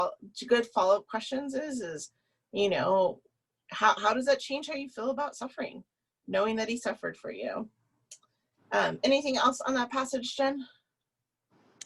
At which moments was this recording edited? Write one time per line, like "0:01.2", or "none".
none